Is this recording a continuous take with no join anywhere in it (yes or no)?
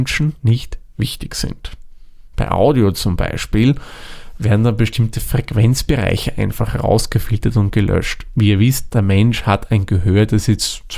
yes